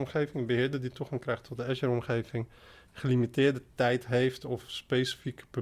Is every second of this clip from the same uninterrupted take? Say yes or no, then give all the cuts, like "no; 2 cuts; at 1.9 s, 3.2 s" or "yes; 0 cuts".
yes; 0 cuts